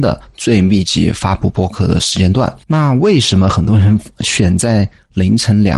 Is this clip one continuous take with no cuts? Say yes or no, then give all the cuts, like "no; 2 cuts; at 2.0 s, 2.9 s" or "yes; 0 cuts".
no; 1 cut; at 2.6 s